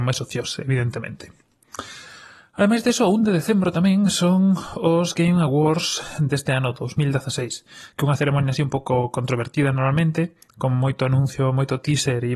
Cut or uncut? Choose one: uncut